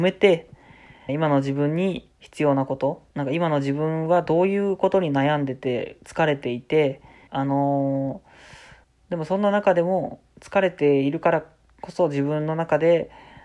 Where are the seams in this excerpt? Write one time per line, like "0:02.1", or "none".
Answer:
0:01.1
0:02.1
0:03.1
0:07.3
0:08.8